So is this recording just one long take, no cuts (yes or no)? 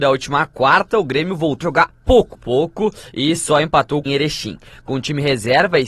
no